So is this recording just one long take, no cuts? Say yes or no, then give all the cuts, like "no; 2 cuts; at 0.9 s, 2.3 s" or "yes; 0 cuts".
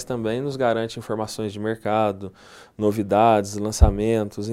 yes; 0 cuts